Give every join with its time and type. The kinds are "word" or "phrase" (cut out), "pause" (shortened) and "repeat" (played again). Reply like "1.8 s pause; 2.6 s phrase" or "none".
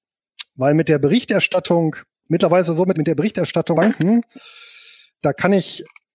2.1 s pause; 2.9 s word; 3.7 s word; 5.1 s word